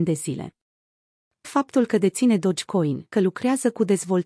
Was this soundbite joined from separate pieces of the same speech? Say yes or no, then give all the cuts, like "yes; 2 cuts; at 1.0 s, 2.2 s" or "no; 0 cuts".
yes; 2 cuts; at 1.4 s, 3.1 s